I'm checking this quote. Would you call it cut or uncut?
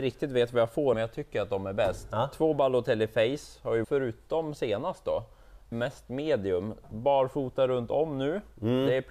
cut